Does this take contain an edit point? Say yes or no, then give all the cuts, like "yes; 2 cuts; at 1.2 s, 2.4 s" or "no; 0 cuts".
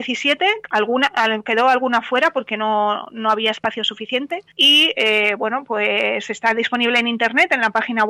no; 0 cuts